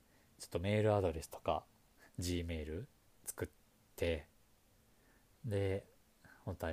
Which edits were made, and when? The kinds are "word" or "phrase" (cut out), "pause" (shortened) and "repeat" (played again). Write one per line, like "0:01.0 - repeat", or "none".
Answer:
none